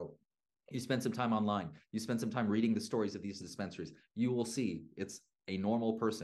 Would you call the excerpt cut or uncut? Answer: uncut